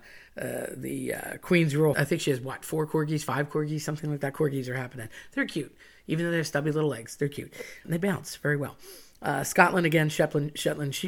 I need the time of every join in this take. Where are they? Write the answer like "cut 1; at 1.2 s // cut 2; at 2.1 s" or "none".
cut 1; at 1.9 s // cut 2; at 7.8 s

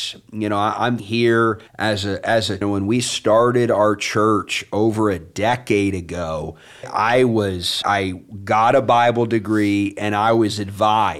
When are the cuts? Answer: cut 1; at 1.0 s // cut 2; at 1.7 s // cut 3; at 2.6 s // cut 4; at 6.8 s // cut 5; at 7.8 s

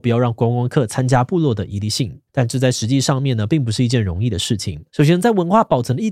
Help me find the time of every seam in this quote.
cut 1; at 2.3 s // cut 2; at 4.9 s

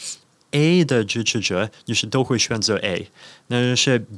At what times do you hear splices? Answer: none

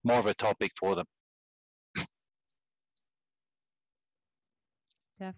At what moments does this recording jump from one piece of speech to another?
none

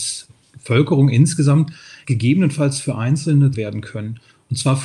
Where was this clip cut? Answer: cut 1; at 2.0 s // cut 2; at 3.5 s

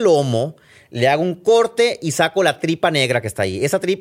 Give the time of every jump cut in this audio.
none

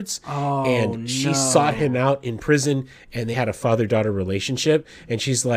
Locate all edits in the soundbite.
cut 1; at 3.3 s

